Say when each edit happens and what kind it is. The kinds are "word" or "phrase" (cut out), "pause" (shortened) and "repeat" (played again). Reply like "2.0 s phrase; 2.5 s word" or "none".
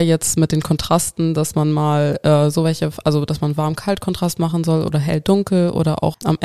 none